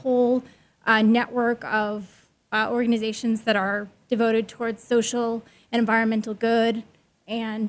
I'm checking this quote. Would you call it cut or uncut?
uncut